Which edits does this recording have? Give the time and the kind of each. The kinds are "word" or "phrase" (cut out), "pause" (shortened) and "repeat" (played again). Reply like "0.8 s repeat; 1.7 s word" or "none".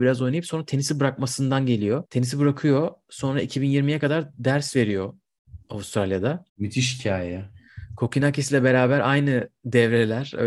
2.1 s pause; 6.5 s pause